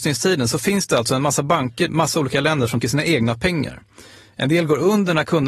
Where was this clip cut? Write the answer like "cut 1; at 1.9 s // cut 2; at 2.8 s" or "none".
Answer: cut 1; at 1.8 s // cut 2; at 2.8 s